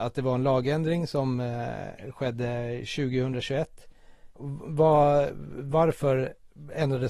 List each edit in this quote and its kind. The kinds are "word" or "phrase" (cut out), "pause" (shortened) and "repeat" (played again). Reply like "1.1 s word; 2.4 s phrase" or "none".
none